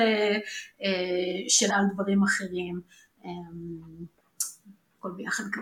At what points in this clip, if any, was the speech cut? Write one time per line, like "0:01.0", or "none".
0:01.7